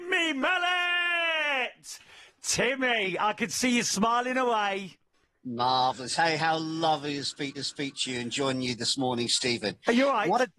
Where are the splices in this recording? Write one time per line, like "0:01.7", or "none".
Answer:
0:07.6